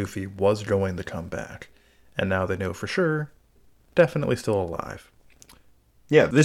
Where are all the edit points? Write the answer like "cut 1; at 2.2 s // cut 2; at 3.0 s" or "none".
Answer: none

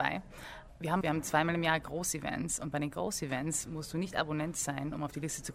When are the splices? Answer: cut 1; at 1.0 s

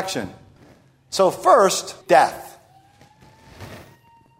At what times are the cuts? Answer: cut 1; at 2.0 s

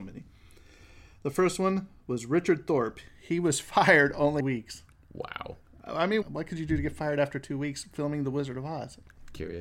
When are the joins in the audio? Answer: cut 1; at 4.4 s // cut 2; at 6.2 s

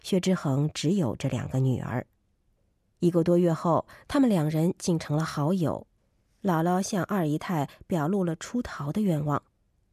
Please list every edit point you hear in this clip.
none

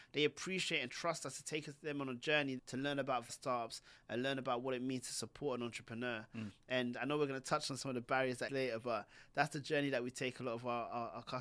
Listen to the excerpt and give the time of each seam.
cut 1; at 2.6 s // cut 2; at 3.3 s // cut 3; at 8.5 s

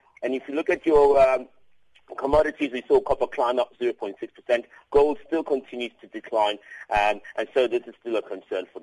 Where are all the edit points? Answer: none

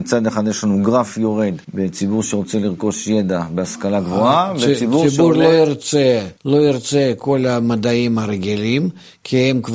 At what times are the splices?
cut 1; at 1.6 s // cut 2; at 6.4 s

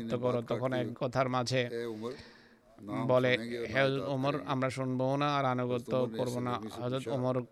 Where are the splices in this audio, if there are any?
cut 1; at 0.9 s

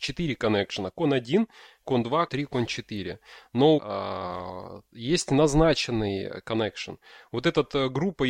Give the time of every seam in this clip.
cut 1; at 2.3 s // cut 2; at 3.8 s

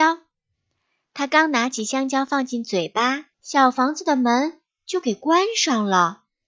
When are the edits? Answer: cut 1; at 3.3 s

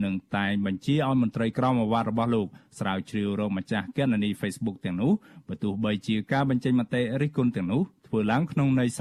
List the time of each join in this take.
none

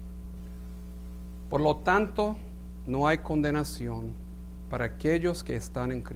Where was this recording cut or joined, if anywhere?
none

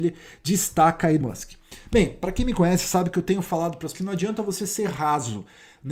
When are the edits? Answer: cut 1; at 1.2 s // cut 2; at 3.9 s

